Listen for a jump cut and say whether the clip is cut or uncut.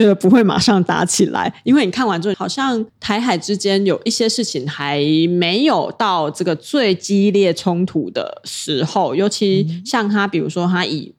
cut